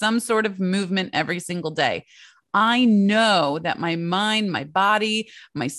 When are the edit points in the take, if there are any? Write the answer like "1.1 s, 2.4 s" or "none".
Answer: none